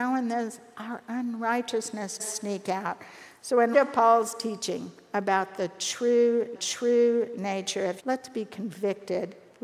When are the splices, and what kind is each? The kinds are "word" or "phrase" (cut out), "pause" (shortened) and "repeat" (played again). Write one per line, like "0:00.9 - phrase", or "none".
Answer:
0:02.2 - word
0:03.7 - word
0:06.5 - repeat
0:08.0 - word